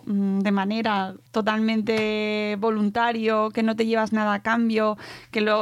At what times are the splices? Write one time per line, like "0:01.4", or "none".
0:01.3

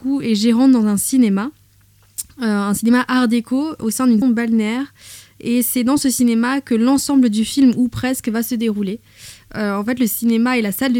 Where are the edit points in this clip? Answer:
0:04.2

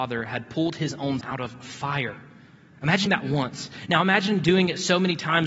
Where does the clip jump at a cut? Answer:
0:01.2
0:03.1

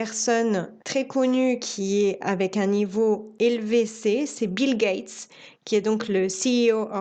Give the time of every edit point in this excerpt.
none

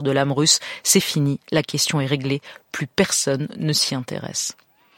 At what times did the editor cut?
none

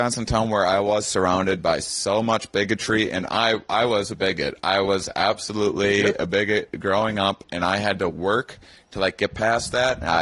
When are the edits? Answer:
none

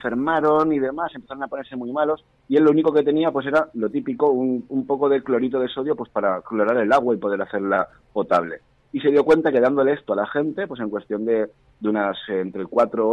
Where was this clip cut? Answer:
none

